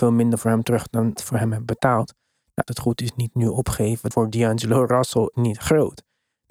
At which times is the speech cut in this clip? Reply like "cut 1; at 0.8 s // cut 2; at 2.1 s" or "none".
cut 1; at 1.2 s // cut 2; at 2.7 s // cut 3; at 4.1 s // cut 4; at 5.3 s